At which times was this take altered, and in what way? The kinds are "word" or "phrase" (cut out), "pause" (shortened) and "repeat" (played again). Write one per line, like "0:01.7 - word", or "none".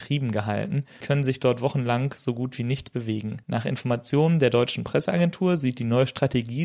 0:01.0 - word
0:03.4 - pause